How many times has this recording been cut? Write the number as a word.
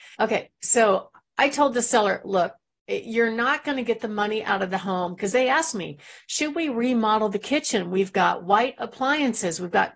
zero